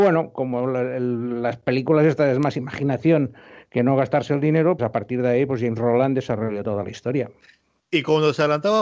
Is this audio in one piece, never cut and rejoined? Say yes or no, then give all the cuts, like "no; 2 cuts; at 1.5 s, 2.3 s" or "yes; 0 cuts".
no; 1 cut; at 4.8 s